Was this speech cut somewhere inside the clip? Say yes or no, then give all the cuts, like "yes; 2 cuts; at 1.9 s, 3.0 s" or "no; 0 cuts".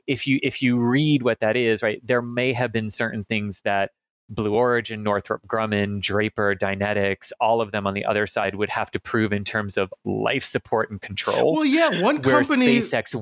no; 0 cuts